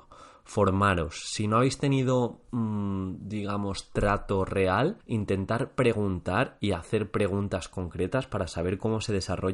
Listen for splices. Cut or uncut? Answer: cut